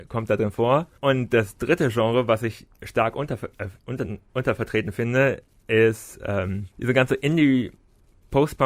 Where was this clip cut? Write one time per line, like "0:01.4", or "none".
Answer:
0:01.0
0:03.8
0:06.7